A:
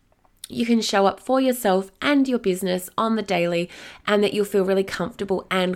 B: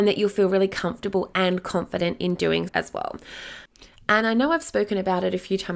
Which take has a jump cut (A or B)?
B